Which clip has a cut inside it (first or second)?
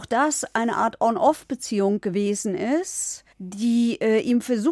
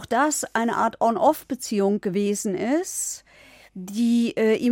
first